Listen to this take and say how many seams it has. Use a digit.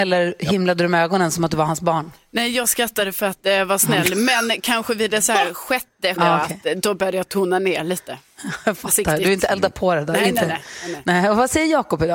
1